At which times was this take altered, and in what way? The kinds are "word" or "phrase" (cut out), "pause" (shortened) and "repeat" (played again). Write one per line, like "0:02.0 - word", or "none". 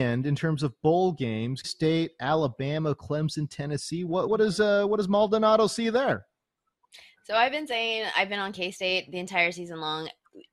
0:01.6 - word
0:04.3 - word